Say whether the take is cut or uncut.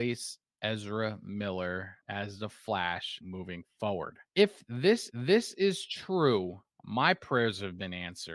cut